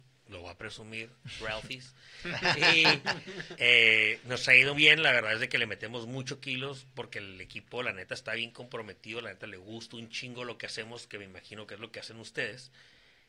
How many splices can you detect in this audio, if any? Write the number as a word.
one